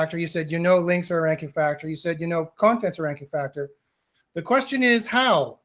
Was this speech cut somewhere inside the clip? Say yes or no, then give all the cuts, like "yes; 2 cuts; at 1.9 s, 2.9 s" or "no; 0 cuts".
no; 0 cuts